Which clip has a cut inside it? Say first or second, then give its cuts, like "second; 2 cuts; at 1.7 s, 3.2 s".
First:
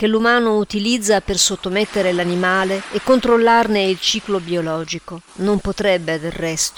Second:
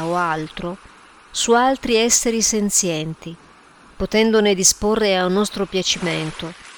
first; 1 cut; at 5.3 s